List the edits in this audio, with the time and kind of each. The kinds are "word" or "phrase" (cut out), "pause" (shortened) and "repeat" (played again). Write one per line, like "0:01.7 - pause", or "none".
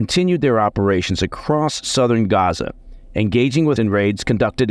0:03.8 - word